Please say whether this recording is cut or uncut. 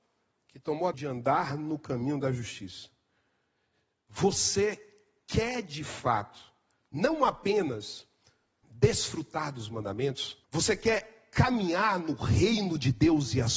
cut